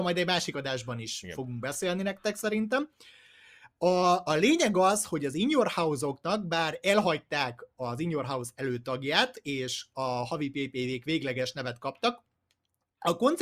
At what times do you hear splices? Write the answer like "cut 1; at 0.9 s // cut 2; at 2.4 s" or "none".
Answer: none